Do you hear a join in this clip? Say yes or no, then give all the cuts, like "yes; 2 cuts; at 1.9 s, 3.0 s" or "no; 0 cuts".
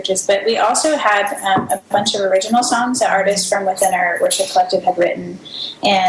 yes; 1 cut; at 1.9 s